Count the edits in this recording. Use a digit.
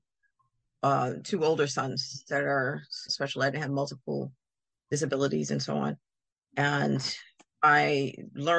1